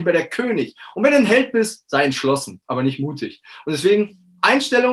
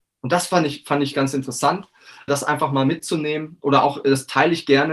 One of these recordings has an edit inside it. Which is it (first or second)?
second